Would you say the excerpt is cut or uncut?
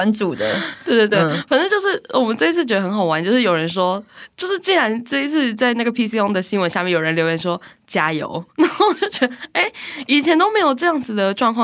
uncut